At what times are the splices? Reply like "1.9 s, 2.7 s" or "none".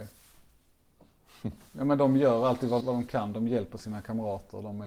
2.8 s